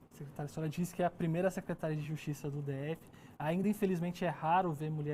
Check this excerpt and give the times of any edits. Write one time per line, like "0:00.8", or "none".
none